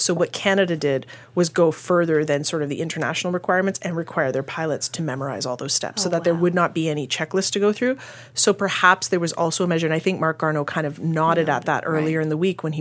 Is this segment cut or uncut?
uncut